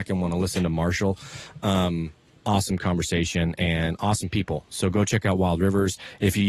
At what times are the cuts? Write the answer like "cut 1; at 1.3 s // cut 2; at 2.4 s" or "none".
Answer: none